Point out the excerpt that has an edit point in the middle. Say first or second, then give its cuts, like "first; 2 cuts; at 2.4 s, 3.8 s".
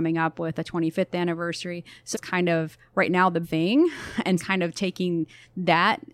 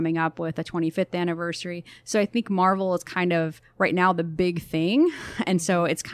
first; 3 cuts; at 2.1 s, 3.4 s, 4.4 s